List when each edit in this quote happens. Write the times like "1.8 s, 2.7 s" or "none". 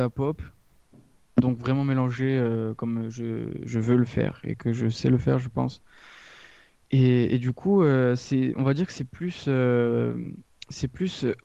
none